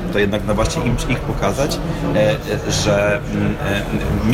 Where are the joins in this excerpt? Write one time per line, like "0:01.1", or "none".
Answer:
0:01.2